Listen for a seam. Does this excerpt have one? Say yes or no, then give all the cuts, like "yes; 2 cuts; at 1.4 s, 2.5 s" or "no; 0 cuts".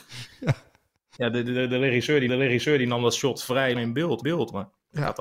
yes; 4 cuts; at 1.1 s, 2.3 s, 3.7 s, 4.2 s